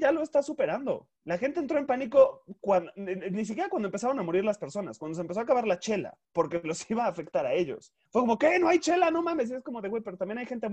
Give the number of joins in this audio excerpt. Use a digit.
3